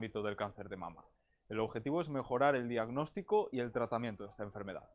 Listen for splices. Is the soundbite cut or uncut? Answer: uncut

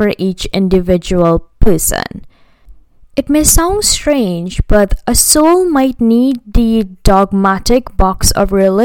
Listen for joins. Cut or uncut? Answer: uncut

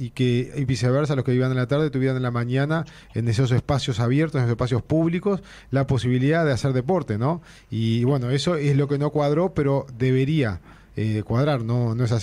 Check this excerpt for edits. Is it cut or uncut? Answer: uncut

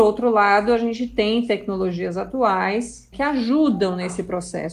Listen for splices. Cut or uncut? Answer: cut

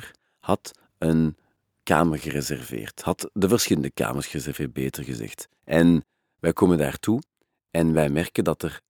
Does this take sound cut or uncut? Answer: cut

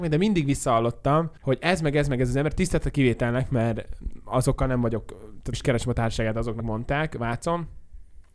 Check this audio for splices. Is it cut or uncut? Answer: cut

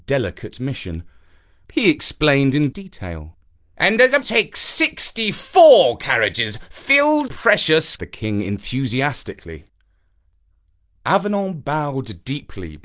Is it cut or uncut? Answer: cut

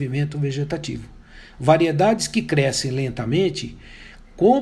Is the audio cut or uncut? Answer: uncut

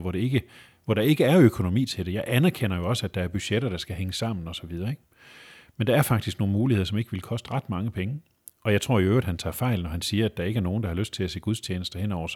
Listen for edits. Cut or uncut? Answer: uncut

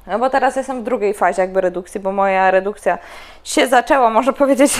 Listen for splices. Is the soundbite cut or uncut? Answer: uncut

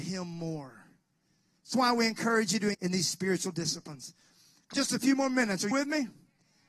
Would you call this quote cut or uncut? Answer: cut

